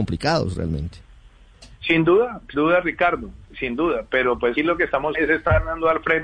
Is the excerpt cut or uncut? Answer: cut